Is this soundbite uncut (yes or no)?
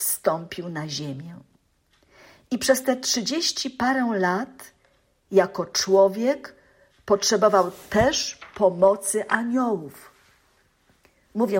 yes